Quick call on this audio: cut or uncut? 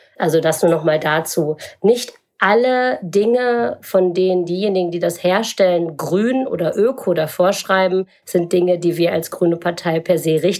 uncut